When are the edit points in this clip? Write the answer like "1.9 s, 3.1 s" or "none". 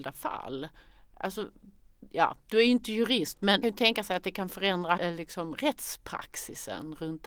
3.6 s, 5.0 s